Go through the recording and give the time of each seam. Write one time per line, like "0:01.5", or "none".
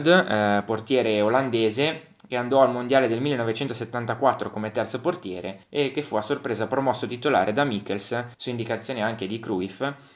0:05.6
0:08.3